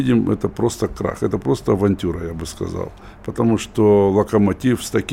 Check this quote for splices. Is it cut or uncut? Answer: uncut